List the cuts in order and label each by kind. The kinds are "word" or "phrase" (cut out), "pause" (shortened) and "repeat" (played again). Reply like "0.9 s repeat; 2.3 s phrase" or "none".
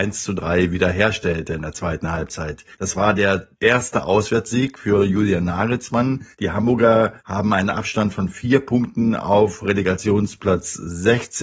2.7 s pause; 3.5 s pause; 6.3 s pause; 7.2 s pause